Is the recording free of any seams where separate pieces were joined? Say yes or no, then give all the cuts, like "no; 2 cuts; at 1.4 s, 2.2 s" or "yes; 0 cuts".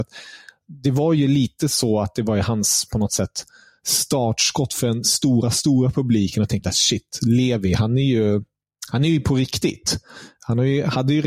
yes; 0 cuts